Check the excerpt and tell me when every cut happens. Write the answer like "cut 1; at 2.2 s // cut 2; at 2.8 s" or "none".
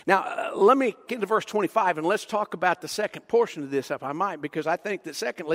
cut 1; at 1.1 s